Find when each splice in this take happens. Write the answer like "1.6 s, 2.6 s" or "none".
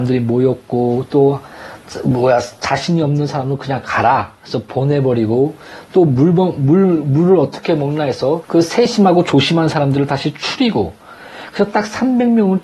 8.4 s